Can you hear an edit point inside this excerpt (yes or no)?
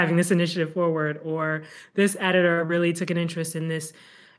no